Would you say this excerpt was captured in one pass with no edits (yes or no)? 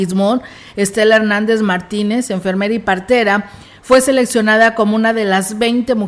yes